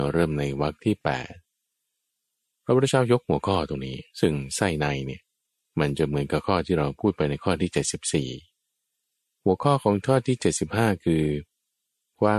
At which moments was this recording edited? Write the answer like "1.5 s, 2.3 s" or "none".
4.1 s